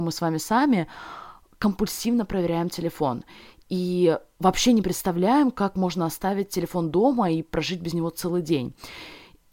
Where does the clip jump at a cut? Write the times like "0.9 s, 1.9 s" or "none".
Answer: none